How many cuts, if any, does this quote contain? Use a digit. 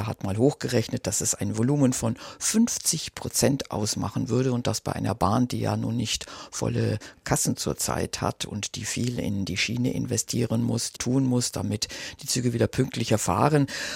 1